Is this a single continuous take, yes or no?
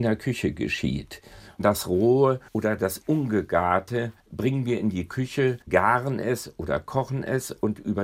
no